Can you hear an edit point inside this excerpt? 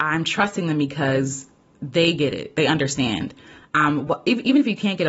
no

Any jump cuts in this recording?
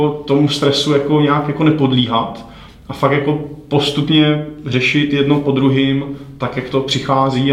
no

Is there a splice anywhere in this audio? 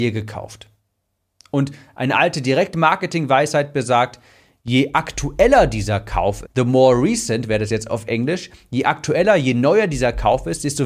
yes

